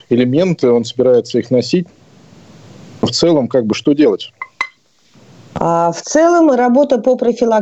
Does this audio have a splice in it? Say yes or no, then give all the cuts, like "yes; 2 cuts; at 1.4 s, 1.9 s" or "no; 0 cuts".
no; 0 cuts